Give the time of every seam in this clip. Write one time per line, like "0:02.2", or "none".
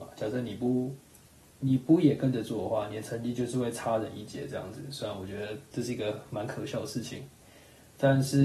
none